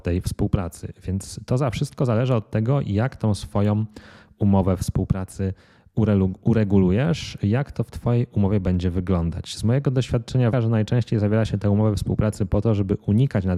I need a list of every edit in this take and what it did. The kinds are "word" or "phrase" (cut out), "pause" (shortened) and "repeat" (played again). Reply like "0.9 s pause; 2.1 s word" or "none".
10.5 s word